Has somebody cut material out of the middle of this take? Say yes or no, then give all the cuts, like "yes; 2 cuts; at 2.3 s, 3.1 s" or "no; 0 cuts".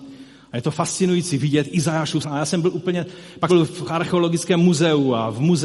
yes; 2 cuts; at 2.2 s, 3.5 s